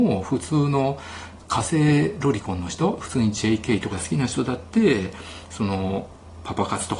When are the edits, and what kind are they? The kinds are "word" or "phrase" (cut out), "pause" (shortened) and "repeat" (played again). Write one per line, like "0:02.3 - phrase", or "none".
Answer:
0:03.9 - word